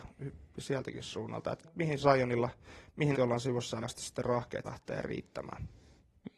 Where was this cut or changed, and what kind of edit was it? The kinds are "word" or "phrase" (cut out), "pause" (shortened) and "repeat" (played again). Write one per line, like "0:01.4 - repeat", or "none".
0:01.6 - word
0:02.0 - word
0:03.1 - word
0:03.8 - word
0:04.6 - word